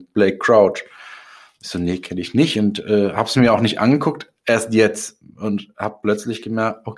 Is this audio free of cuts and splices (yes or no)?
yes